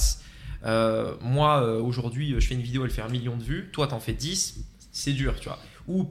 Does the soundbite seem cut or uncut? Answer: uncut